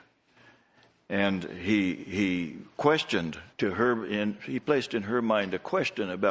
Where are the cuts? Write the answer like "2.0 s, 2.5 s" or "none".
3.5 s

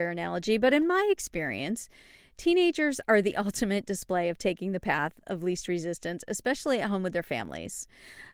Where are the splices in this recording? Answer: none

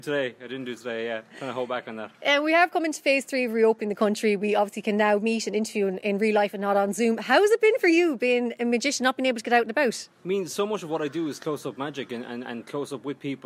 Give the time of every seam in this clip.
2.1 s

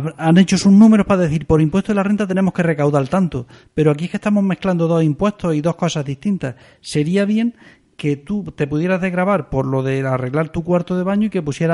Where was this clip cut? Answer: none

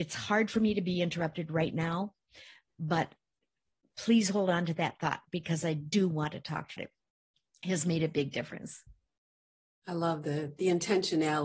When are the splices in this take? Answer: 6.8 s

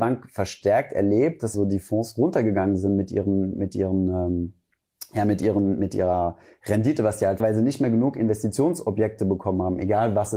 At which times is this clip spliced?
1.5 s, 7.4 s

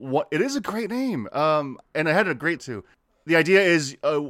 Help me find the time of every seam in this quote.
2.6 s

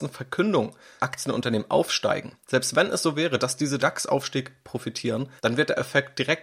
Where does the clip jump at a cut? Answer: 1.0 s, 3.8 s, 5.4 s

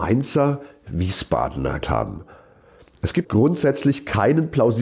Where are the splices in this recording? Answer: 1.8 s, 3.2 s

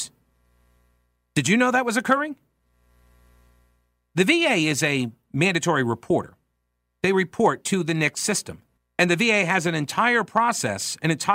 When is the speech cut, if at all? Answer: 8.8 s

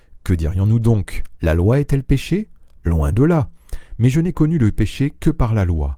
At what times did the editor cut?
none

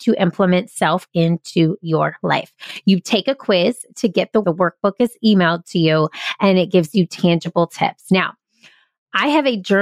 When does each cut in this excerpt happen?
1.1 s, 4.4 s

